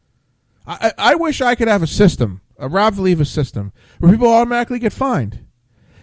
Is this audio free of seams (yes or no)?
yes